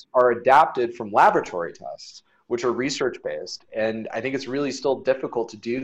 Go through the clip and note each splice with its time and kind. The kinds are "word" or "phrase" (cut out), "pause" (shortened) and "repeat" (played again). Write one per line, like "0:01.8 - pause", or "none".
none